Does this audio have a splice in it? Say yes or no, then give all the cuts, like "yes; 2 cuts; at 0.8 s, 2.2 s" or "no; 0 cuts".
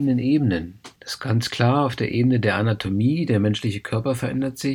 yes; 1 cut; at 1.0 s